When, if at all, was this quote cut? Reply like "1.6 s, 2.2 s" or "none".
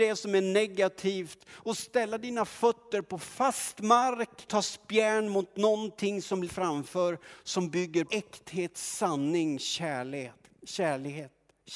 4.5 s, 6.5 s, 8.0 s

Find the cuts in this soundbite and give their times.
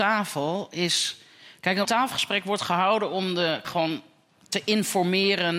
1.8 s, 3.6 s

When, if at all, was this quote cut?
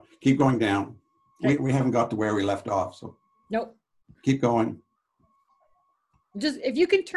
none

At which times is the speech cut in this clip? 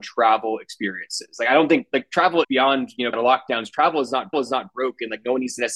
2.4 s, 3.1 s, 4.3 s

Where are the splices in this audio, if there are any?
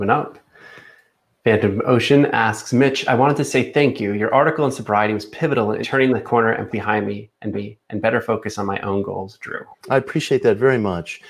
5.8 s, 6.7 s, 7.5 s, 9.7 s

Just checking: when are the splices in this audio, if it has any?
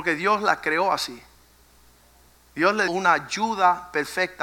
2.9 s

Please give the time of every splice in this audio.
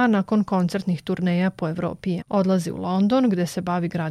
2.2 s

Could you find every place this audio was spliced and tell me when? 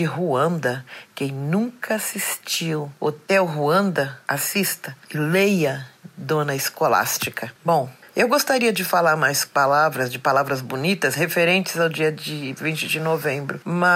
7.6 s, 9.5 s

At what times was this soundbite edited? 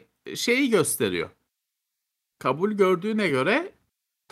none

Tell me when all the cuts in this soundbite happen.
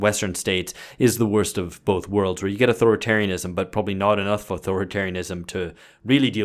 none

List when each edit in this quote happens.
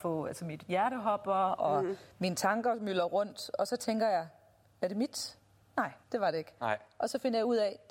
6.0 s

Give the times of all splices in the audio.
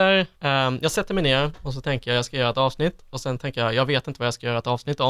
none

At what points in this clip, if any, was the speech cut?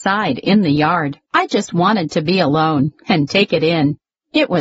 1.3 s

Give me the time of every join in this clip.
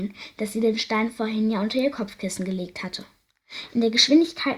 none

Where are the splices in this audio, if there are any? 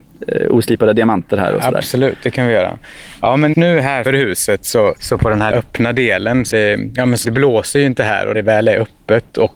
3.5 s, 4.1 s, 5.0 s, 5.5 s, 6.5 s, 7.2 s, 8.3 s

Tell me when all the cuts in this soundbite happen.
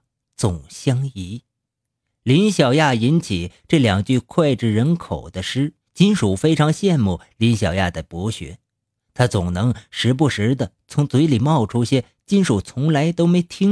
5.8 s

